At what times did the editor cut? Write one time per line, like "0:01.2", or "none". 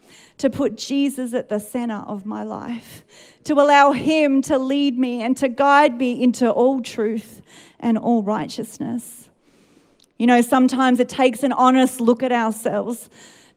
none